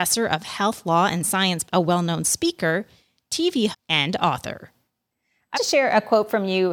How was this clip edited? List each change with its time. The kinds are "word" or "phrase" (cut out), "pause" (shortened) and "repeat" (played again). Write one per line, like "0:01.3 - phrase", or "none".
0:01.6 - word
0:03.7 - word
0:05.5 - word

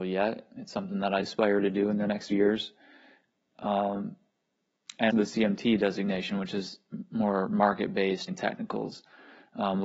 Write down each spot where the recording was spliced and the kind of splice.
0:01.2 - word
0:02.3 - word
0:05.1 - word
0:08.3 - word

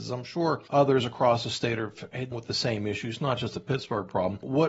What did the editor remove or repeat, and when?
0:02.3 - word

